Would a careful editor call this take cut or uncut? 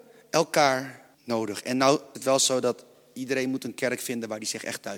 cut